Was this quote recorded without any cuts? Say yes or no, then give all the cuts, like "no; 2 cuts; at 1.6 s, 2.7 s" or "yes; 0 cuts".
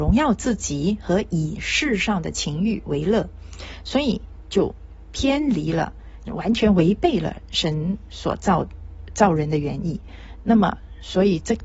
no; 1 cut; at 6.3 s